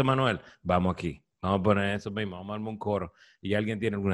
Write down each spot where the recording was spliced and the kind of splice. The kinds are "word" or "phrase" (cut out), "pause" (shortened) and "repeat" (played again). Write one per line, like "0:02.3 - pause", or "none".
none